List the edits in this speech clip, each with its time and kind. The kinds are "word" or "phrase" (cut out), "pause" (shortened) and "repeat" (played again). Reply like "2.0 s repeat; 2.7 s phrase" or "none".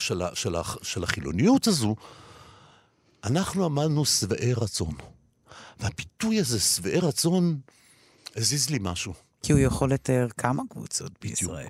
none